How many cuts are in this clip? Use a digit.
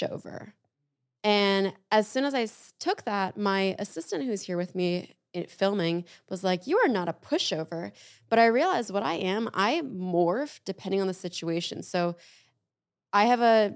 0